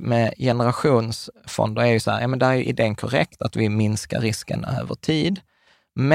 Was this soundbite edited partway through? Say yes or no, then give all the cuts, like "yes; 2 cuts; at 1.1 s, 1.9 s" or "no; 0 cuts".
no; 0 cuts